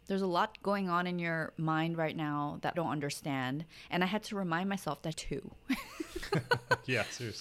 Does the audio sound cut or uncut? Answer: cut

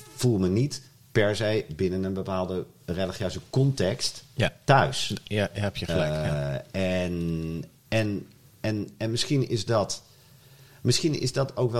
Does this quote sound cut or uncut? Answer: uncut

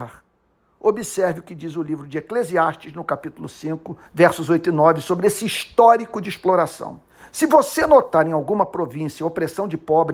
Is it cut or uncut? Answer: cut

